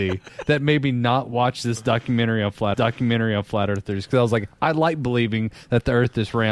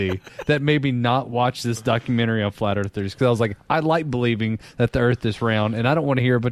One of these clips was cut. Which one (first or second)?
first